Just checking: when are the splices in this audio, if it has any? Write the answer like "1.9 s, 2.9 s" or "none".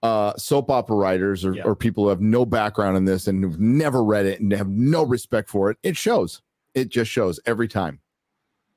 none